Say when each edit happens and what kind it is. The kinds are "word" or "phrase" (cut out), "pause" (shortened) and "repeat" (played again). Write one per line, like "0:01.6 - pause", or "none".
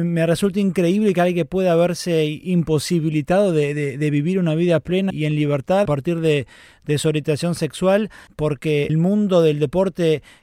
0:05.1 - word
0:05.8 - word
0:08.3 - word
0:08.9 - word